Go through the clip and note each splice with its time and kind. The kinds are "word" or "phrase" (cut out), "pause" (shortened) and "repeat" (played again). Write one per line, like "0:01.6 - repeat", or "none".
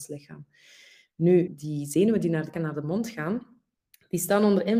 0:01.5 - word
0:02.5 - word